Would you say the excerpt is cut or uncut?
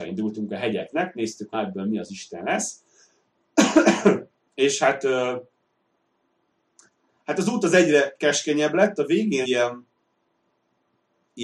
cut